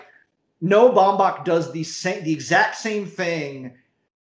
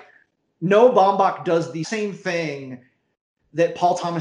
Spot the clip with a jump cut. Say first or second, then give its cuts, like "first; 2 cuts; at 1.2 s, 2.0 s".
second; 1 cut; at 1.8 s